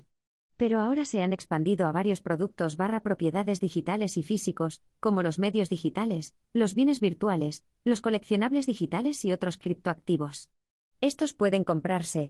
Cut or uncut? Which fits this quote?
uncut